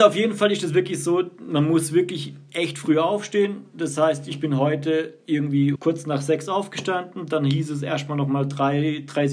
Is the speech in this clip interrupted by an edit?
yes; 1 cut; at 5.8 s

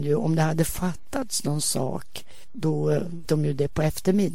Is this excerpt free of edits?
no; 1 cut; at 3.2 s

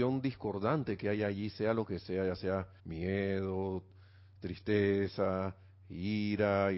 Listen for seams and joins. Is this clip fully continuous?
no; 1 cut; at 2.8 s

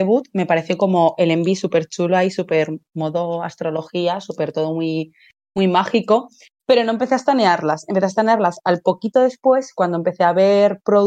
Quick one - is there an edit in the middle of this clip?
no; 0 cuts

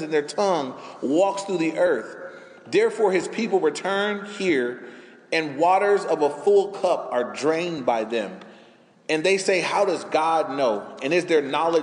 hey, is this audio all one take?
yes; 0 cuts

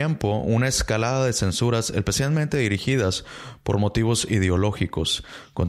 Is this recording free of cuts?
yes; 0 cuts

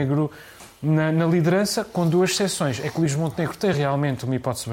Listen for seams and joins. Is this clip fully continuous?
yes; 0 cuts

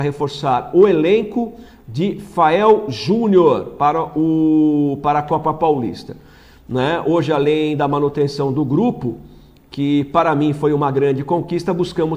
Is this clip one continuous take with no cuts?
yes; 0 cuts

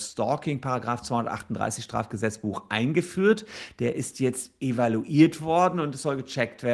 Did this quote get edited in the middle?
no; 0 cuts

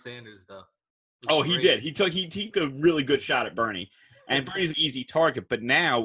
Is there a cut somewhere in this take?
yes; 2 cuts; at 2.5 s, 4.7 s

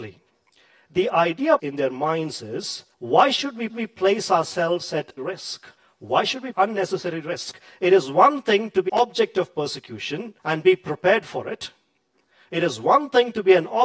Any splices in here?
yes; 8 cuts; at 1.6 s, 2.9 s, 3.7 s, 5.2 s, 5.8 s, 6.5 s, 8.9 s, 10.4 s

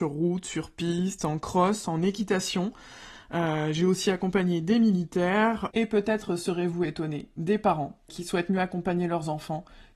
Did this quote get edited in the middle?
yes; 1 cut; at 8.1 s

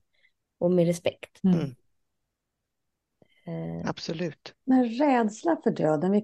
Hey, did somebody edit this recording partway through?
yes; 2 cuts; at 1.4 s, 4.6 s

